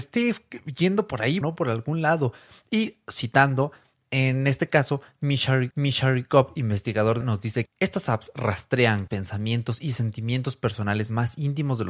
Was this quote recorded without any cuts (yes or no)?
no